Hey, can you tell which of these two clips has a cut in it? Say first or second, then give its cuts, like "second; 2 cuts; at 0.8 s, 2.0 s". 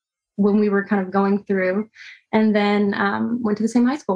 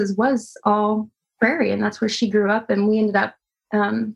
second; 1 cut; at 1.2 s